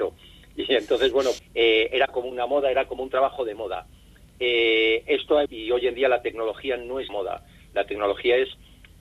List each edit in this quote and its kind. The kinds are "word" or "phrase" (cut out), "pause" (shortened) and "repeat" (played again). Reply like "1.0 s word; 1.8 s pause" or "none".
1.4 s word; 5.5 s word; 7.1 s word